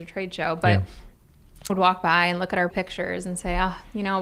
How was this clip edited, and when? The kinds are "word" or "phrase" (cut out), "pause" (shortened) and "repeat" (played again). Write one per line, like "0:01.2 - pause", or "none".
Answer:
0:01.7 - word
0:02.7 - word

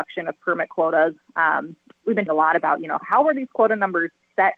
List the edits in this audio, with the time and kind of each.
0:02.3 - word
0:03.0 - word

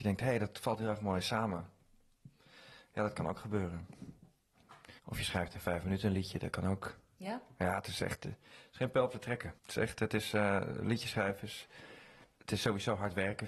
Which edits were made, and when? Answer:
0:05.0 - pause
0:09.6 - pause
0:12.2 - pause

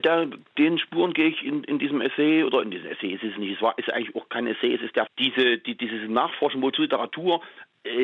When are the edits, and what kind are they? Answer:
0:05.1 - word

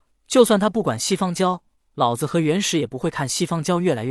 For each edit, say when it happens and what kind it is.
none

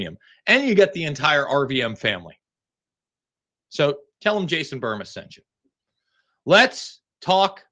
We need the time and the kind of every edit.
none

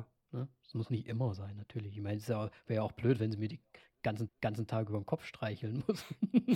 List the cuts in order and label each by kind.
0:04.3 - repeat

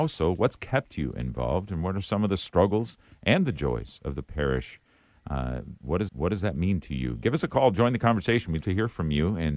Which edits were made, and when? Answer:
0:06.1 - repeat
0:08.6 - word

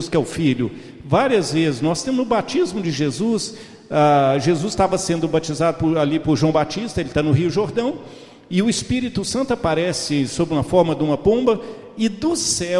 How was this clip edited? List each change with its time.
none

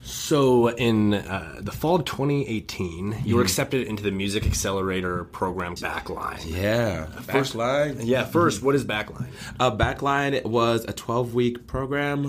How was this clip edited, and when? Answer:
0:05.8 - word

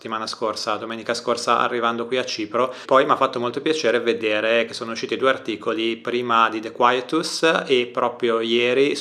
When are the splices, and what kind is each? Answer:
none

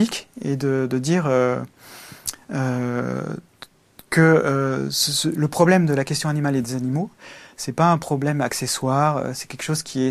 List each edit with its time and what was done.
none

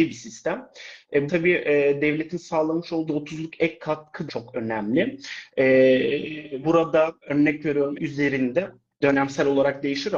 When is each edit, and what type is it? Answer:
0:01.3 - word
0:03.1 - word
0:04.3 - word
0:06.6 - word
0:07.2 - word
0:07.9 - word
0:09.0 - word

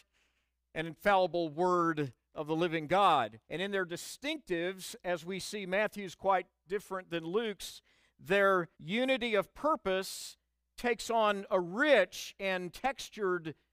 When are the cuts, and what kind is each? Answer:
0:03.4 - pause
0:08.7 - pause

